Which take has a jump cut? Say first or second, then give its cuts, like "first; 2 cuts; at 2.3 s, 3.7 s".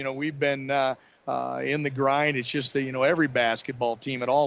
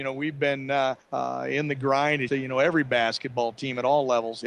second; 2 cuts; at 1.0 s, 2.3 s